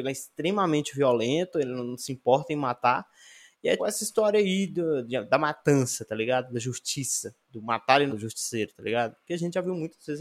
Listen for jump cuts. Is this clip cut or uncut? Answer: cut